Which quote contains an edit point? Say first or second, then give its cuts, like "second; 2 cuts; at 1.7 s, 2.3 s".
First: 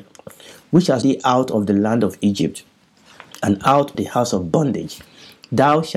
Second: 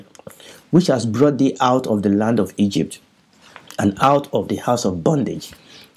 first; 2 cuts; at 1.0 s, 3.9 s